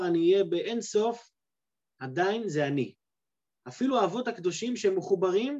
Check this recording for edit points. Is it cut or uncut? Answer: uncut